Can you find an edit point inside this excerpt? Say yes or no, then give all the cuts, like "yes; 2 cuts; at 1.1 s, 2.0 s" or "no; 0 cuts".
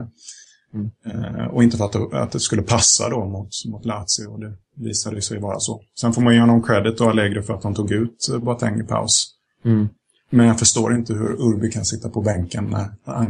yes; 1 cut; at 9.5 s